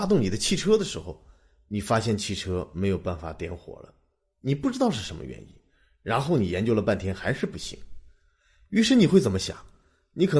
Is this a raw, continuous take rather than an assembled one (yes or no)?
yes